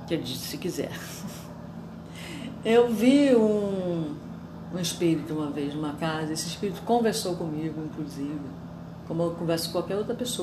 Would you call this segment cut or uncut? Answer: uncut